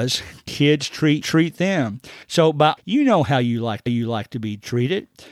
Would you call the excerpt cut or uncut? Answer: cut